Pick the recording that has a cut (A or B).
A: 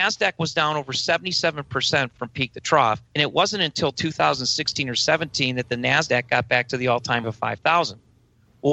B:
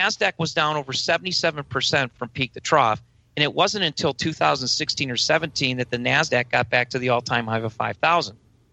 A